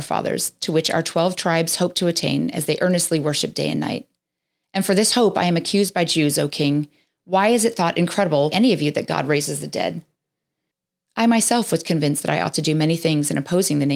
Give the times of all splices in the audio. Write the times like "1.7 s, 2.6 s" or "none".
8.5 s